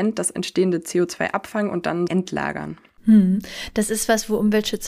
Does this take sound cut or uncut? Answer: cut